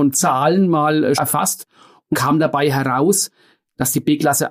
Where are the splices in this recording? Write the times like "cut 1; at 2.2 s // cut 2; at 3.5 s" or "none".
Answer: cut 1; at 1.2 s // cut 2; at 2.1 s